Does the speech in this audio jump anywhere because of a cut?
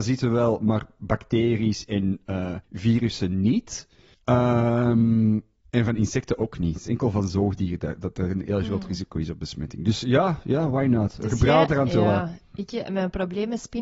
yes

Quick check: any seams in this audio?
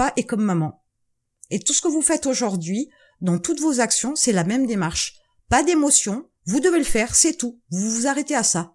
no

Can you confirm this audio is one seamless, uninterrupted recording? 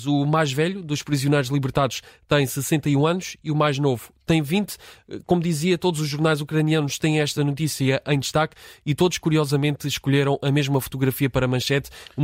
yes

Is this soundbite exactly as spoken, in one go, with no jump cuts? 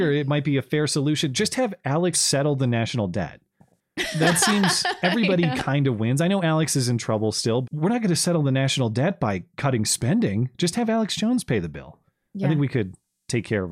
no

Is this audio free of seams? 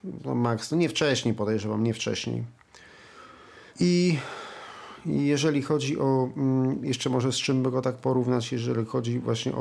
no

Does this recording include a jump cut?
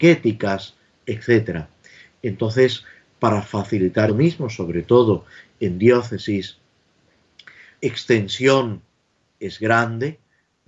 yes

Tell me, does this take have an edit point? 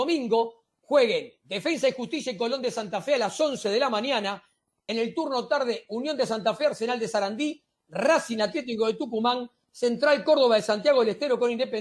no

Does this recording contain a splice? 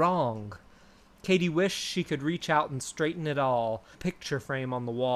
yes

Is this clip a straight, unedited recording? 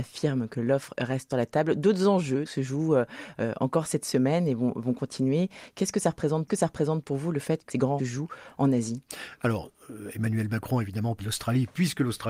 no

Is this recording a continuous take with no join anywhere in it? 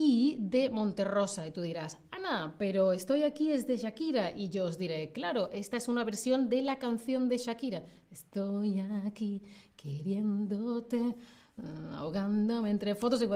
yes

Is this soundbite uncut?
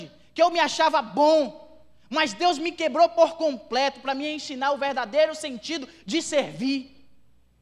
yes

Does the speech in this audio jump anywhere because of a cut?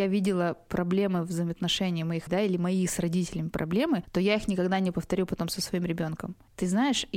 yes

